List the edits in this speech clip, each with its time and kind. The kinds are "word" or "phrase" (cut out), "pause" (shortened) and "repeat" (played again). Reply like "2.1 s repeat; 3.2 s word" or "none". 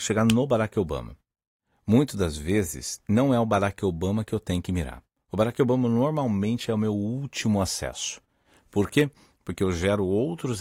none